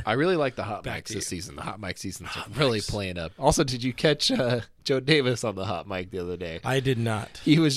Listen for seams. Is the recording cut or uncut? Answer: uncut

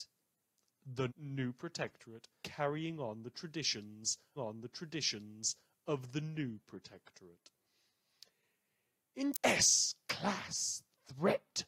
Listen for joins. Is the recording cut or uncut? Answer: cut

